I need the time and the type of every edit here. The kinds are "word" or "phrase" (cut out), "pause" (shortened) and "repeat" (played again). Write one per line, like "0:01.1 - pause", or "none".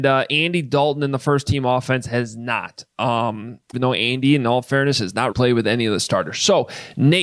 0:03.7 - word
0:05.3 - word